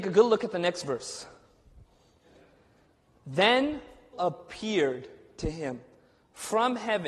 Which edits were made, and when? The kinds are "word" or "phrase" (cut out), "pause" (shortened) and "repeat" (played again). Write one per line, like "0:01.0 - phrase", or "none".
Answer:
0:04.1 - phrase